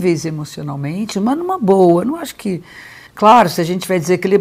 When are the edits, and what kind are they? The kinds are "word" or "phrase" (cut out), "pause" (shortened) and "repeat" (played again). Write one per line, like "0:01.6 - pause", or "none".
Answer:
0:03.1 - pause

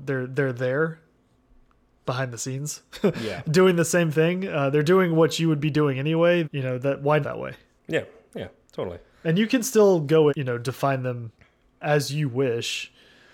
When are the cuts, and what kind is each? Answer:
0:02.0 - word
0:06.4 - word
0:07.2 - phrase
0:10.3 - phrase

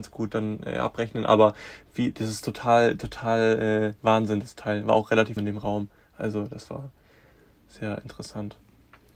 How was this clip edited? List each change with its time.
0:04.0 - pause
0:05.4 - phrase

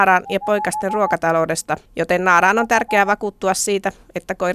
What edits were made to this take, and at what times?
0:01.9 - pause

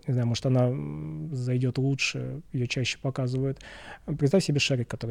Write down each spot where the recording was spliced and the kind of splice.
none

